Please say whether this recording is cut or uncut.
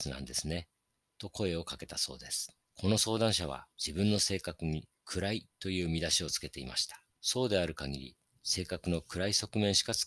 cut